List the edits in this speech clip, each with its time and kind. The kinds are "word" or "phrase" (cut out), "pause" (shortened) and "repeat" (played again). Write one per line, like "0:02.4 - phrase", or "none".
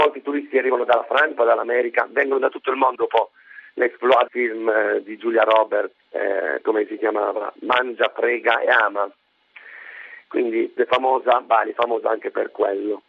0:01.4 - word
0:02.9 - word
0:04.3 - word
0:06.0 - word
0:07.6 - word
0:10.8 - word